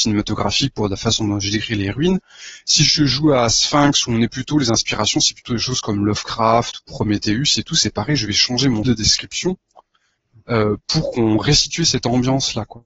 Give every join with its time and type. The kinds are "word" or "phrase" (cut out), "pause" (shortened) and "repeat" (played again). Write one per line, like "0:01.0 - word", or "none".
0:08.8 - word